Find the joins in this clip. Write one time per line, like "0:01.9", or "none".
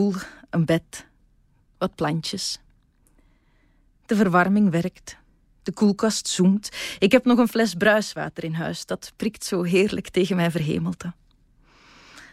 none